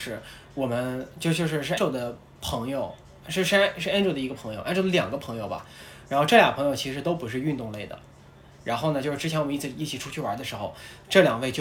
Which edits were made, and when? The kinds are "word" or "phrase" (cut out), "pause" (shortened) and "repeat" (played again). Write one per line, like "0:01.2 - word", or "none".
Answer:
0:01.8 - word